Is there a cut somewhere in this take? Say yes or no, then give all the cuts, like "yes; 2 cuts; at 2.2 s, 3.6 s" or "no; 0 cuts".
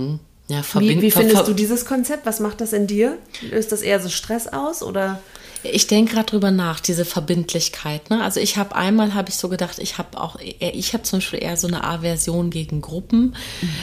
no; 0 cuts